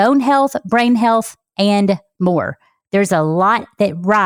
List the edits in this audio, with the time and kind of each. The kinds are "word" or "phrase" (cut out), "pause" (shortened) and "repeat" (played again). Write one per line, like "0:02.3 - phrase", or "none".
none